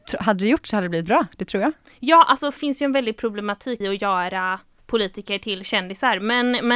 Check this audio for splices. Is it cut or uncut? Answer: cut